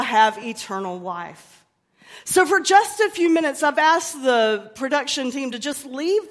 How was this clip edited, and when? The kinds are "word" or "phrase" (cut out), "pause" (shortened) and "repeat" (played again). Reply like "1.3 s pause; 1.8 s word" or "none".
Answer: none